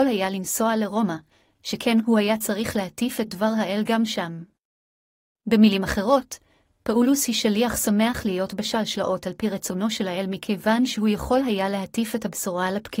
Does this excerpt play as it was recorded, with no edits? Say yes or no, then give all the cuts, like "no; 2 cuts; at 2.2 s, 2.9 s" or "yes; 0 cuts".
yes; 0 cuts